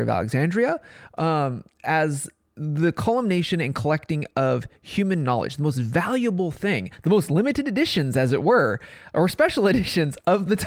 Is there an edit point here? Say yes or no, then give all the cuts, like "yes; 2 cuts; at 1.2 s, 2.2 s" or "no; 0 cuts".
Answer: no; 0 cuts